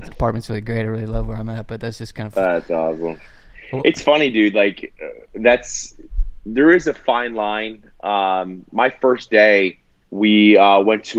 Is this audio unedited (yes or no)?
no